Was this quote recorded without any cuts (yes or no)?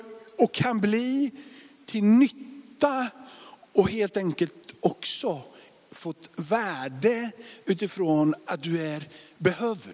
yes